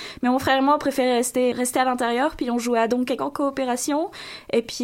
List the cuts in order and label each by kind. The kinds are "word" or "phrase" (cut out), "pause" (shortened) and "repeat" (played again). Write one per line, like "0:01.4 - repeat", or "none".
0:01.5 - word
0:03.2 - word